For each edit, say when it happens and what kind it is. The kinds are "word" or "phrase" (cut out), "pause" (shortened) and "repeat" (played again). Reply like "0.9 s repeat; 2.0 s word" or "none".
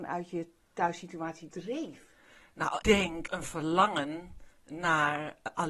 1.5 s word; 2.8 s word; 3.3 s word